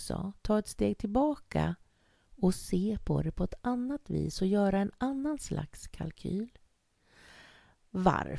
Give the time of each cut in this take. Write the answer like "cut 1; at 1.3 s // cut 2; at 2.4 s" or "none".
none